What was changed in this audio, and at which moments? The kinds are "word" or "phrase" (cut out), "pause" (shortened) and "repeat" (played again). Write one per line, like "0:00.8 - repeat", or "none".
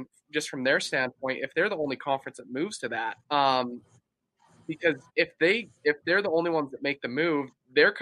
0:03.2 - pause
0:05.1 - pause